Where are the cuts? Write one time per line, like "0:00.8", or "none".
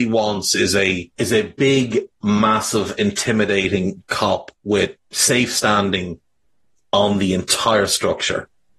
0:01.1
0:05.0